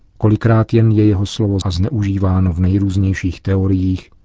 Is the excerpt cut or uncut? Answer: cut